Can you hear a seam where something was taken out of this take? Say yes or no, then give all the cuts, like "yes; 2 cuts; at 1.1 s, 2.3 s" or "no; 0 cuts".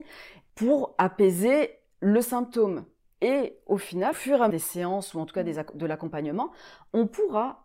yes; 2 cuts; at 4.1 s, 4.5 s